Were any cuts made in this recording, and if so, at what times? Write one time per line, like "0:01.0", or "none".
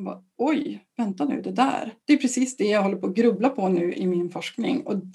0:02.0